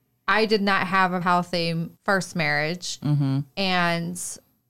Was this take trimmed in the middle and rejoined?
yes; 2 cuts; at 1.2 s, 2.0 s

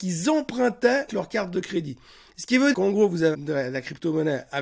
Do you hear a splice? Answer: yes; 3 cuts; at 1.1 s, 2.7 s, 3.3 s

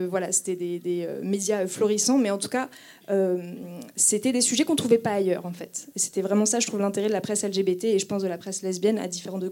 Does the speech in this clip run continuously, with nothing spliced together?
yes; 0 cuts

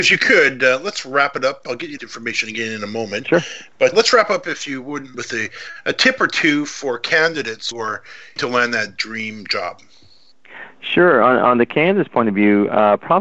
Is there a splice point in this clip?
yes; 5 cuts; at 2.0 s, 3.9 s, 5.1 s, 7.7 s, 8.4 s

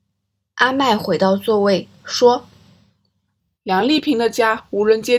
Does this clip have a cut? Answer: no; 0 cuts

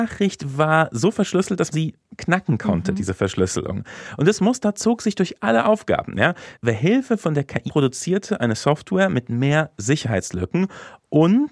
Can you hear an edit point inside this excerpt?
yes; 2 cuts; at 1.7 s, 7.7 s

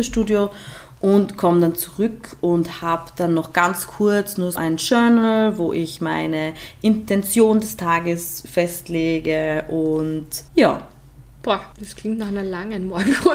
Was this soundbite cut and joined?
yes; 3 cuts; at 4.6 s, 10.5 s, 11.7 s

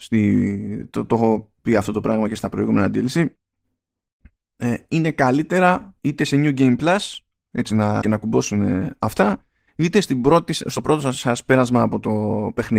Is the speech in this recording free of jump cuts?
no; 2 cuts; at 6.0 s, 8.0 s

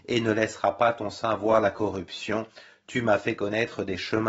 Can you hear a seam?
no; 0 cuts

